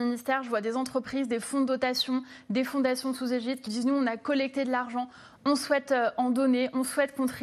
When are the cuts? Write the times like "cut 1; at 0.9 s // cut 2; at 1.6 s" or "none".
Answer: cut 1; at 3.7 s

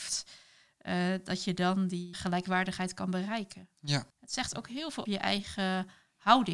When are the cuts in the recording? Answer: cut 1; at 2.1 s // cut 2; at 4.1 s // cut 3; at 5.1 s

